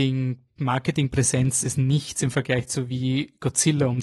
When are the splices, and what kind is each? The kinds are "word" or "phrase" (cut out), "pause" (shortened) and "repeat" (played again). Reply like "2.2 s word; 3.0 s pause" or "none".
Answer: 1.6 s word